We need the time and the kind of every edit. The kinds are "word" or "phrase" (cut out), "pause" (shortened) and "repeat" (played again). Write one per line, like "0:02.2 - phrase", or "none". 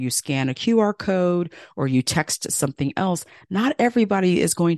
none